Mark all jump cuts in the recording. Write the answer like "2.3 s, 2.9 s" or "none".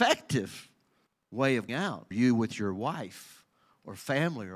1.1 s, 1.7 s, 2.1 s